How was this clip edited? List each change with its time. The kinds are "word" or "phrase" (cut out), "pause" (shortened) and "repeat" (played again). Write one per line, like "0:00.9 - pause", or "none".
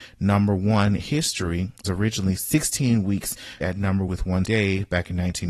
0:01.0 - word
0:01.8 - word
0:02.4 - word
0:03.6 - word
0:04.1 - word
0:04.4 - word